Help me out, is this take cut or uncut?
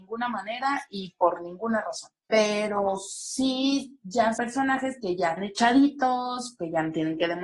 cut